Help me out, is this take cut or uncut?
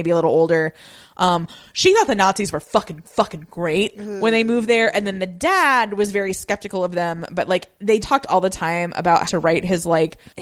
cut